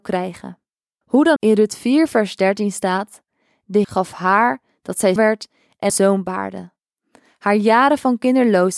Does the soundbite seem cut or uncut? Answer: cut